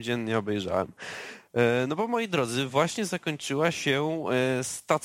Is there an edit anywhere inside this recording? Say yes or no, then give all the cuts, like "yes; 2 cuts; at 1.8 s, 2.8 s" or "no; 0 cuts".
no; 0 cuts